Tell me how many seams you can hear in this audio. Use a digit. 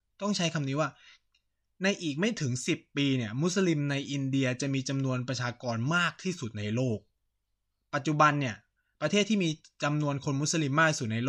0